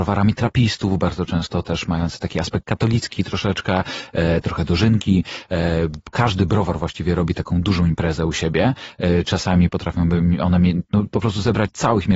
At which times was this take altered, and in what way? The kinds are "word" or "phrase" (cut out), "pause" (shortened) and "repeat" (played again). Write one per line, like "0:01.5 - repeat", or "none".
0:04.4 - phrase